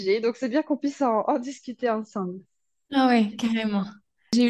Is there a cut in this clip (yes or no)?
no